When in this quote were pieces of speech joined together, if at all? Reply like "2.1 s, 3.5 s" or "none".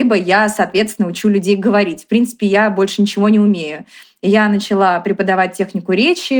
none